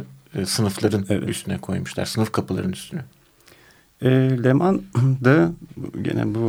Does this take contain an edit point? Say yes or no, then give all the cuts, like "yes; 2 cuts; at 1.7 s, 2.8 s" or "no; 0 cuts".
no; 0 cuts